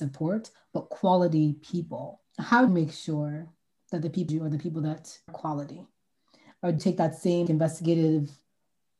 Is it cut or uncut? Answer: cut